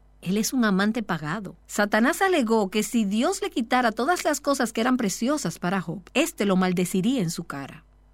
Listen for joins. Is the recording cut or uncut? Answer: cut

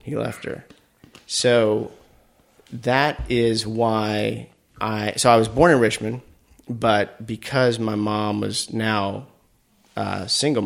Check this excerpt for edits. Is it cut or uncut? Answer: uncut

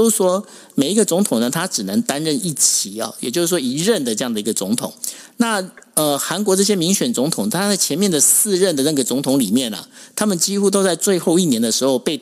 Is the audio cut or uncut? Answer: uncut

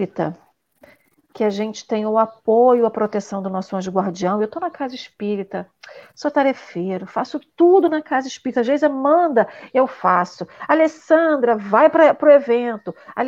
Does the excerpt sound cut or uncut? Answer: uncut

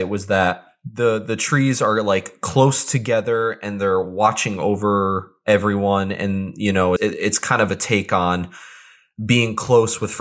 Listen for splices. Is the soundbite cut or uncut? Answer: cut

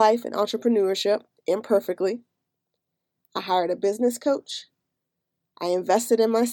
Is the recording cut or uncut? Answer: uncut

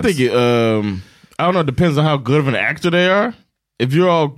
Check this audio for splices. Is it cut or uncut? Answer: uncut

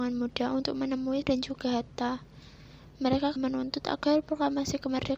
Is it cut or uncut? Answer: cut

